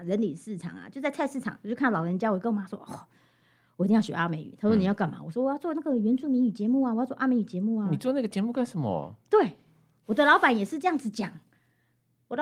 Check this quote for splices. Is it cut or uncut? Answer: uncut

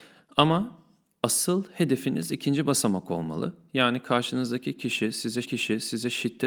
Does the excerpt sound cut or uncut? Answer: cut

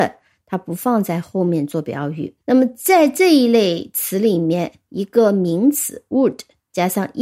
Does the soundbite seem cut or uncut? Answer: cut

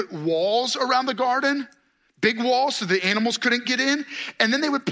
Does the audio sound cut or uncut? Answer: uncut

